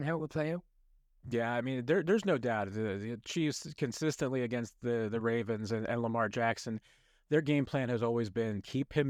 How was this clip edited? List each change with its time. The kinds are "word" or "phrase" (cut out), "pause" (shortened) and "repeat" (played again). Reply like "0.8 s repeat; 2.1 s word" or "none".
none